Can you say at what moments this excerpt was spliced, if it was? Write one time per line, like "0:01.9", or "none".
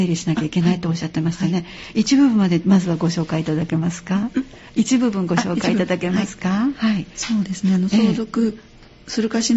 0:07.1